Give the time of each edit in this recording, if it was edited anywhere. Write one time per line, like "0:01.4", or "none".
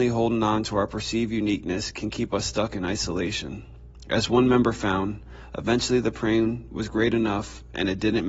none

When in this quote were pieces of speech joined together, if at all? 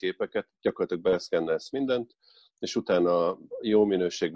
none

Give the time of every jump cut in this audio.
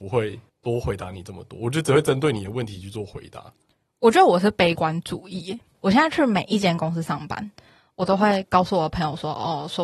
none

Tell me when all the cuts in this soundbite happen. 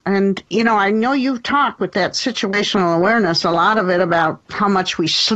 0:04.4

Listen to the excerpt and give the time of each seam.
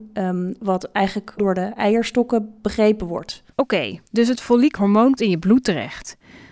0:01.4
0:03.5
0:04.1
0:04.8
0:05.2

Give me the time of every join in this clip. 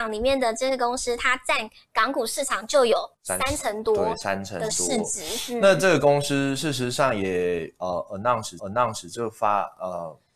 0:03.1
0:08.6

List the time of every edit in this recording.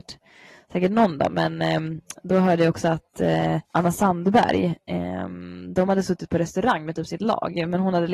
0:03.6

